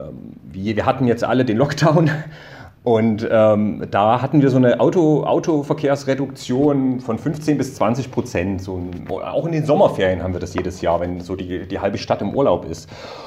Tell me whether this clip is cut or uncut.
uncut